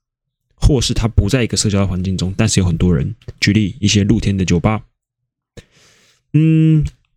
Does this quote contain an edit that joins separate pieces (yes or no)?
no